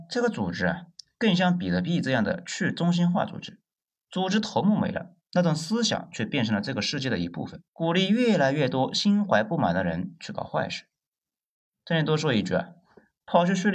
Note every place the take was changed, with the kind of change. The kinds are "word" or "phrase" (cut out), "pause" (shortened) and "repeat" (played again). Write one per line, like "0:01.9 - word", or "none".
0:07.7 - pause